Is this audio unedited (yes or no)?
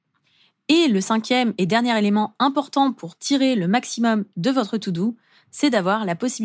yes